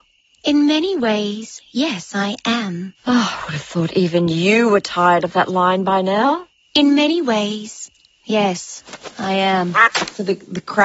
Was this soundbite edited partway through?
no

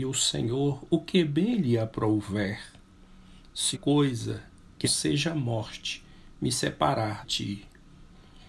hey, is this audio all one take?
no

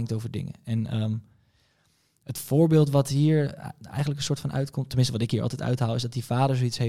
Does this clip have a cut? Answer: no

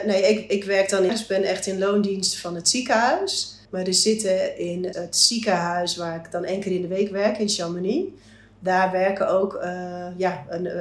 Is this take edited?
yes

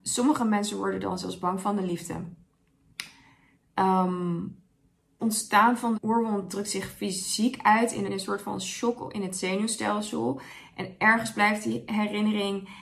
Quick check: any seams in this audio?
yes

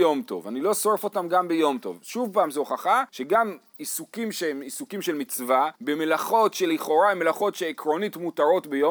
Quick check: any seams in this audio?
yes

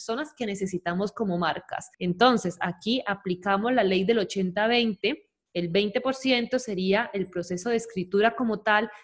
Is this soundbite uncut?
yes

